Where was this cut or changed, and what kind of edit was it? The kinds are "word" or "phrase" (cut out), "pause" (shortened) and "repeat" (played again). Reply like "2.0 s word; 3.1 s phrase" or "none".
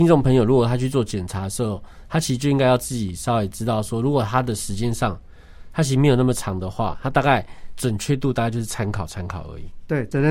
none